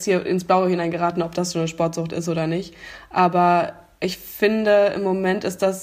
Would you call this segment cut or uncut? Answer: uncut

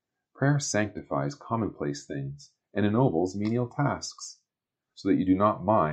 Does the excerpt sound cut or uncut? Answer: uncut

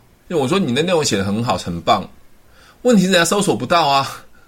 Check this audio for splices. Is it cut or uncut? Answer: uncut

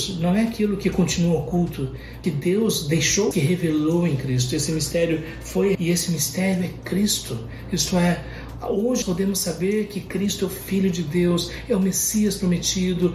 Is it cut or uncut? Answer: cut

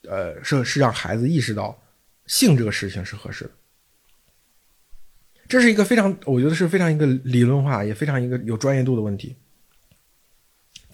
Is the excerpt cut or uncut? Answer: uncut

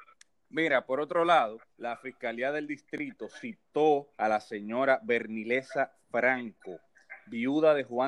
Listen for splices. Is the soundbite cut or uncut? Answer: cut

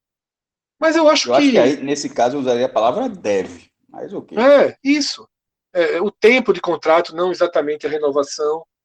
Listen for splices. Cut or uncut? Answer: uncut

